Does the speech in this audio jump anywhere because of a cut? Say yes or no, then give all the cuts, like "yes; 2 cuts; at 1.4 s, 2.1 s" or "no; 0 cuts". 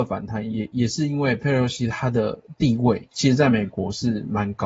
yes; 1 cut; at 3.1 s